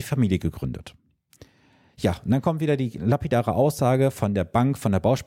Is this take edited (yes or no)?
no